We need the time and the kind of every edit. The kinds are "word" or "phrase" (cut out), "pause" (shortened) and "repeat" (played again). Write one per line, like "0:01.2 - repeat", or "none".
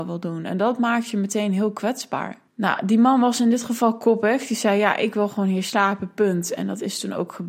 0:02.5 - pause